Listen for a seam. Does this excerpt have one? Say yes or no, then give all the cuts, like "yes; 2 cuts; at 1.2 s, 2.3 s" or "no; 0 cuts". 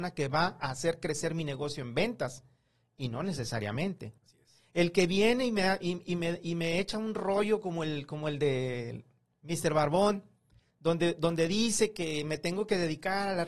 yes; 1 cut; at 4.2 s